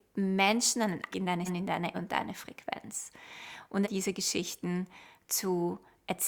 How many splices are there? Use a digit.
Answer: 4